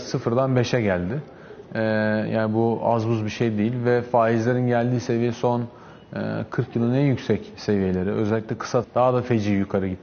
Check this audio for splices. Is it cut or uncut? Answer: cut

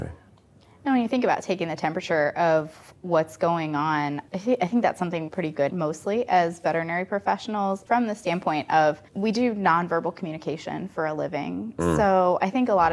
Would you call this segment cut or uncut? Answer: cut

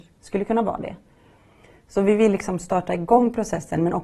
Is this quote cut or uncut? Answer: uncut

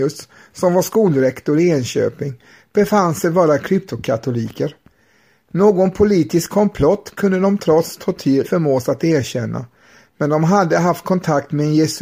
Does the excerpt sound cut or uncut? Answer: cut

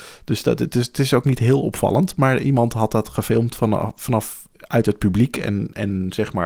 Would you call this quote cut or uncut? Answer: uncut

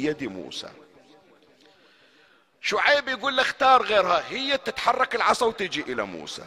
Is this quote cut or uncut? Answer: uncut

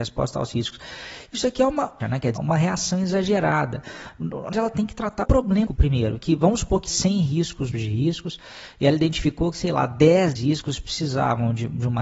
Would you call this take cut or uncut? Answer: cut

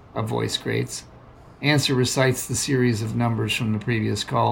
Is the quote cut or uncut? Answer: uncut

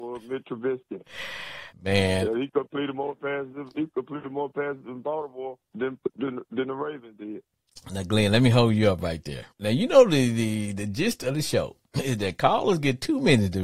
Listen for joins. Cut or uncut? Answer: cut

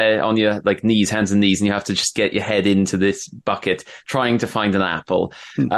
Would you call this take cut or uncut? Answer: uncut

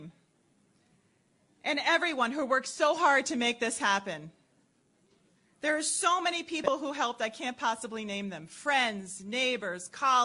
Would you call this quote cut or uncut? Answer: uncut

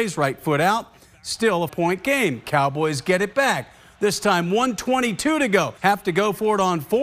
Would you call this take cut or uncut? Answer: cut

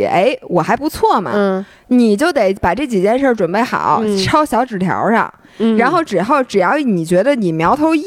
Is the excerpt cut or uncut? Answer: uncut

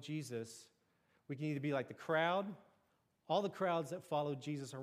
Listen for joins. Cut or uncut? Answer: uncut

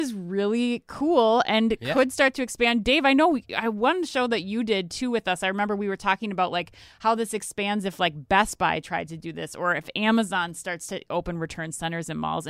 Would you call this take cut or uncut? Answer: uncut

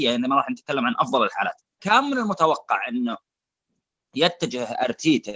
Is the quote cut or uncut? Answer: cut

